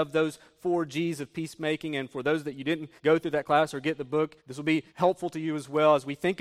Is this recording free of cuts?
no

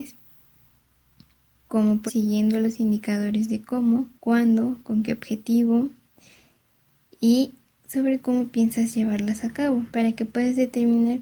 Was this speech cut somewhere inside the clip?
yes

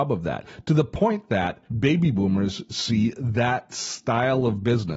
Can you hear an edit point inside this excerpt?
yes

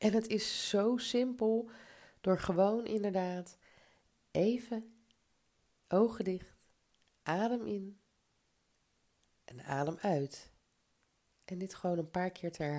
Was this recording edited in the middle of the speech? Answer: no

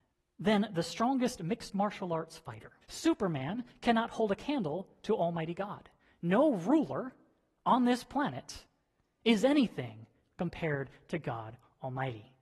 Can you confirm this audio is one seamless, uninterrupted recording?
no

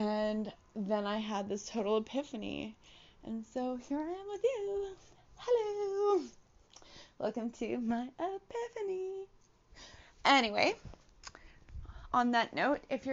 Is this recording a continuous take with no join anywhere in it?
yes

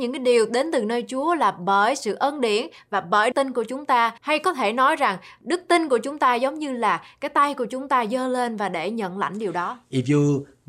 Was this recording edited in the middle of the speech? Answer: yes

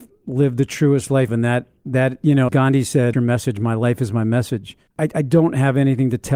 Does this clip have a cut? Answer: yes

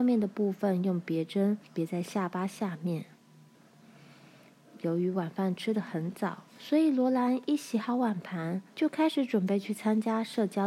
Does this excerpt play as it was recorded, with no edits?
no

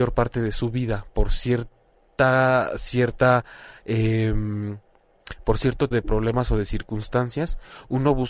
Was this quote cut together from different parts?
yes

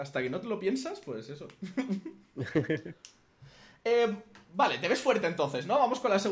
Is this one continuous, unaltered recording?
yes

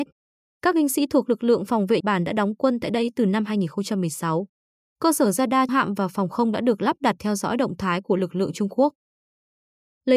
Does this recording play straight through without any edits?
no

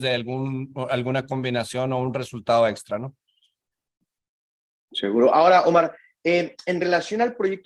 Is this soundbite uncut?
yes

